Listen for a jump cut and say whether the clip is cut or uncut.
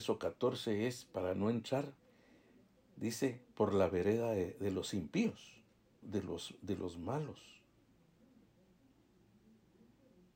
cut